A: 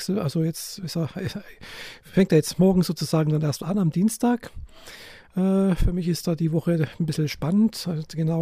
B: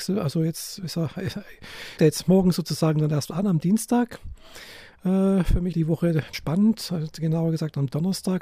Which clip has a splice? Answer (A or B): B